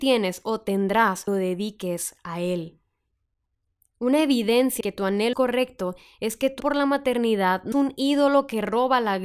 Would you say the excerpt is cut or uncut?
cut